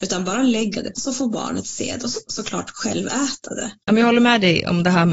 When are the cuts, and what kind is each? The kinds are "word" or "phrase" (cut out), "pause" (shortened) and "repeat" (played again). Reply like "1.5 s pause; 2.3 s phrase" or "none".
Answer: 0.9 s word; 2.3 s word